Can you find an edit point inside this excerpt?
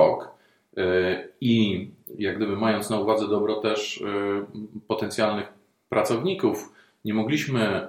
no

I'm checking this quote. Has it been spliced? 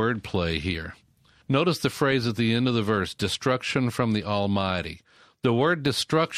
no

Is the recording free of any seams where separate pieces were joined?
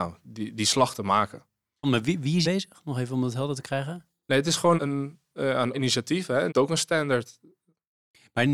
no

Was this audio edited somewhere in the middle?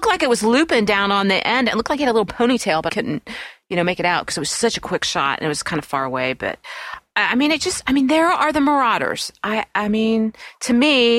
yes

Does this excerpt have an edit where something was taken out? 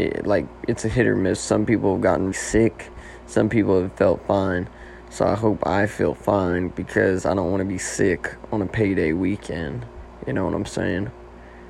yes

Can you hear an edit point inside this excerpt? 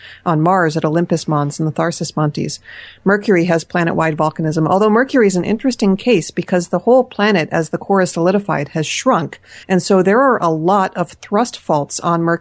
yes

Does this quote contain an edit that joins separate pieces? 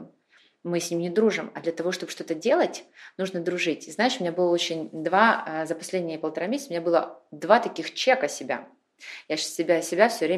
no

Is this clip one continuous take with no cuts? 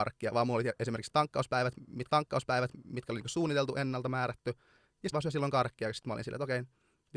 no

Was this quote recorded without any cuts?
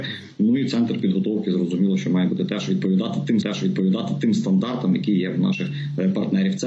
no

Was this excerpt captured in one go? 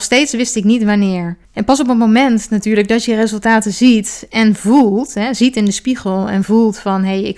no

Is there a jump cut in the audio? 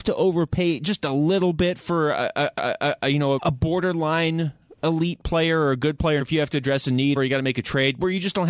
yes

